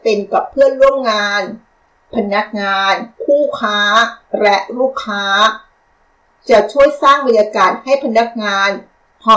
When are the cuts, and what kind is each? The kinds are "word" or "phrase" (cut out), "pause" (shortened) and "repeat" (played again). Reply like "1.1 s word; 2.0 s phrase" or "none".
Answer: 3.1 s pause